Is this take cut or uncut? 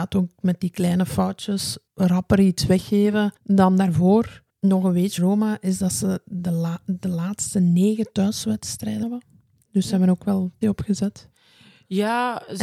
cut